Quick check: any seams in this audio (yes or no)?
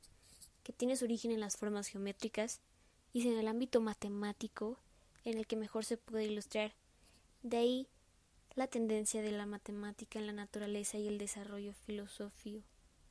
no